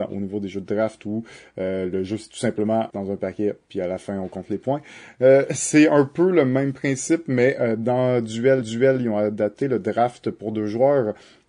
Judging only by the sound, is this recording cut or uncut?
cut